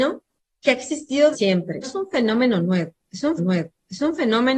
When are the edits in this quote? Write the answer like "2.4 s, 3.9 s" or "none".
1.3 s, 1.8 s, 3.4 s